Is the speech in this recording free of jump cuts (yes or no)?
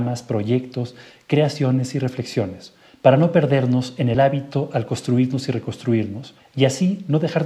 yes